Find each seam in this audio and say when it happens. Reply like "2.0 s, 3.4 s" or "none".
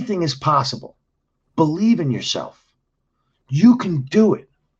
none

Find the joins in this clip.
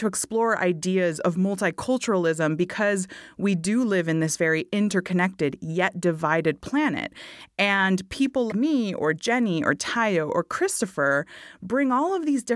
8.5 s

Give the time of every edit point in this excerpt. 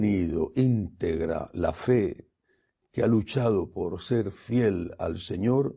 none

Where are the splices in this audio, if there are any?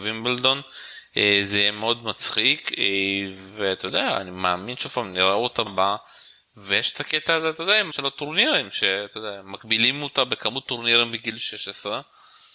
5.7 s, 7.9 s

